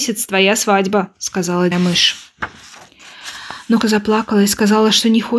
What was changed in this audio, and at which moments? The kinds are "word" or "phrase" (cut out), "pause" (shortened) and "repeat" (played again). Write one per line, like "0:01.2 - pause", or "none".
0:01.7 - phrase
0:03.8 - word